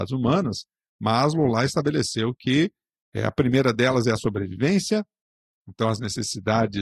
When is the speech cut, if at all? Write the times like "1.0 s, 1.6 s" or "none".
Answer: none